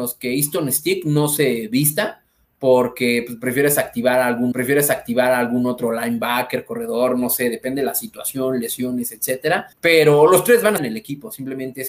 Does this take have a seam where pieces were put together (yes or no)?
yes